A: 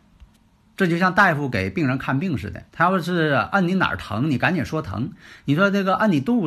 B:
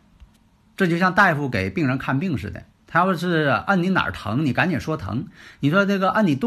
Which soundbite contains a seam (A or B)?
A